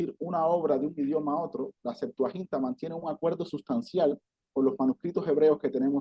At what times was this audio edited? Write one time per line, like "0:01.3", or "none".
0:01.8